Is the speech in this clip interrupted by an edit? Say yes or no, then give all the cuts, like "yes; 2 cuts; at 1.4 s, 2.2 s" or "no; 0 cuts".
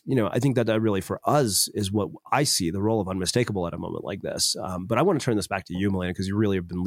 no; 0 cuts